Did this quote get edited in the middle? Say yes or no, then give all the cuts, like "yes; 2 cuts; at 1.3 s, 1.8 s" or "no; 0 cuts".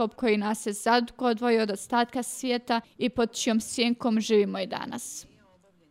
yes; 1 cut; at 2.8 s